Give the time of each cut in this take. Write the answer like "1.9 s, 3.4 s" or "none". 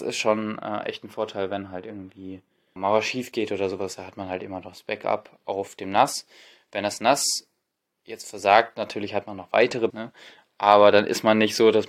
2.8 s, 9.9 s